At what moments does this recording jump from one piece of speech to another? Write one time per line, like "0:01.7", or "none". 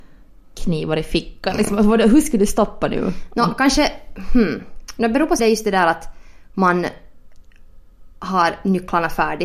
0:05.4